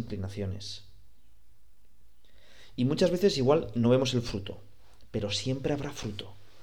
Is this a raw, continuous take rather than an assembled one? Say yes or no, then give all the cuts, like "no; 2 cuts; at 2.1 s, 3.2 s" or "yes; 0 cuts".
yes; 0 cuts